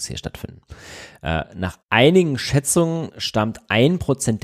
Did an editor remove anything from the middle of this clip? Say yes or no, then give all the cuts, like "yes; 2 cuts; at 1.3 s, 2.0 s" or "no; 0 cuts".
yes; 1 cut; at 1.8 s